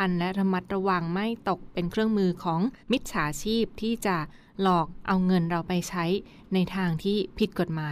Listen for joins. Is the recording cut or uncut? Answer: cut